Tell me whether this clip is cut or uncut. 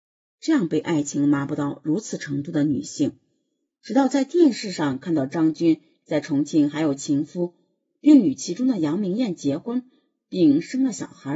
uncut